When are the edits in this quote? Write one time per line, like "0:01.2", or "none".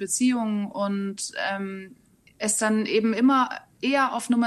0:02.3